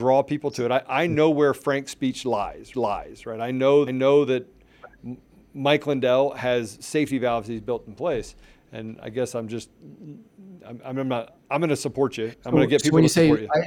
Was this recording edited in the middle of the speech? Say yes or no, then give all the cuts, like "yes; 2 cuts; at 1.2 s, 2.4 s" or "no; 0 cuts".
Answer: yes; 3 cuts; at 2.7 s, 3.9 s, 11.4 s